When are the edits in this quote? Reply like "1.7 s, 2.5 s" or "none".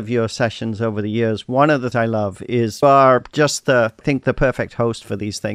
1.9 s, 2.8 s, 4.0 s